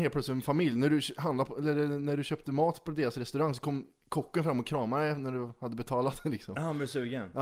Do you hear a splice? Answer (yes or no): no